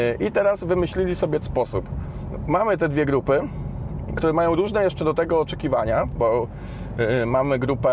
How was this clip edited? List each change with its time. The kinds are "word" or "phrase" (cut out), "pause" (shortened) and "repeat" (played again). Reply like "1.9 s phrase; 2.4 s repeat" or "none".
1.4 s word